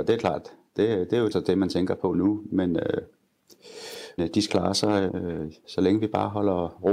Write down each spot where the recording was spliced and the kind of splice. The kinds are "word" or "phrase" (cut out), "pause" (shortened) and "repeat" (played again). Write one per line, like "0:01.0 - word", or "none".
0:01.3 - word
0:04.2 - word
0:04.5 - word
0:05.1 - word
0:05.6 - word